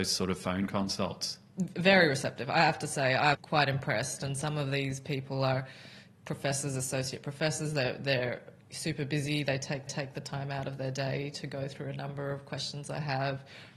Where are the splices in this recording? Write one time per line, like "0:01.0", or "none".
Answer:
0:03.3
0:08.6
0:09.9